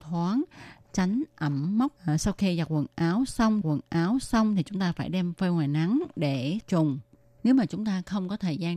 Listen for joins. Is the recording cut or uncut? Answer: cut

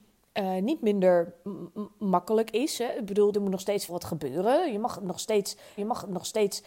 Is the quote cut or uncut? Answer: cut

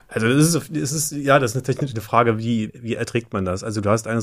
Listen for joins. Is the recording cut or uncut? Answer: cut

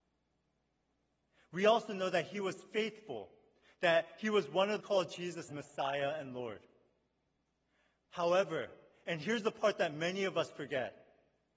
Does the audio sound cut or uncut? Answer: cut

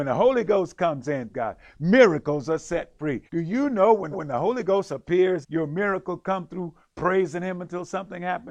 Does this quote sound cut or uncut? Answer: cut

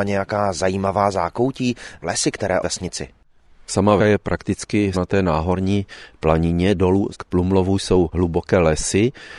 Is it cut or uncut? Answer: cut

